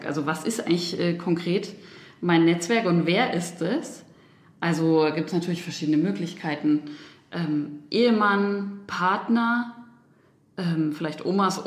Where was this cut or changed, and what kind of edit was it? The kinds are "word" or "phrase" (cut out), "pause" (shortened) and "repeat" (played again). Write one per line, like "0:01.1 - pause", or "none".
none